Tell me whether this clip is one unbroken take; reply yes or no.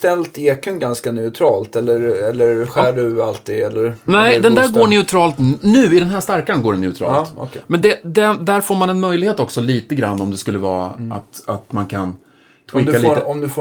yes